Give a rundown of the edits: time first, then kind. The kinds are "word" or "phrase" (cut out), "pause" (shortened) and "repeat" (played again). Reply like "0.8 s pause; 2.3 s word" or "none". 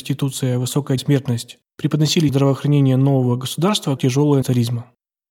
1.0 s word; 2.3 s word; 4.0 s word; 4.4 s word